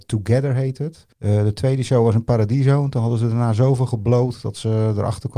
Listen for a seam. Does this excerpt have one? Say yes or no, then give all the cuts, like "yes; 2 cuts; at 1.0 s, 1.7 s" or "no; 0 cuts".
yes; 1 cut; at 1.1 s